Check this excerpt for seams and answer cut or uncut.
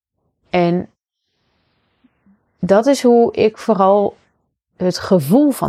uncut